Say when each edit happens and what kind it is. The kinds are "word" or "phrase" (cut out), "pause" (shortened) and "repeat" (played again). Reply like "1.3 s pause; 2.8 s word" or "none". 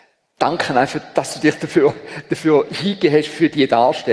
none